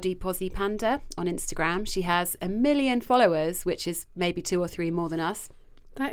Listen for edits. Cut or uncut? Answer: uncut